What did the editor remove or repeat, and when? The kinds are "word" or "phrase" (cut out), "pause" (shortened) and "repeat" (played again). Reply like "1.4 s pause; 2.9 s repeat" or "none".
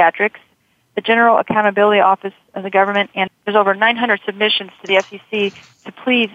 3.3 s word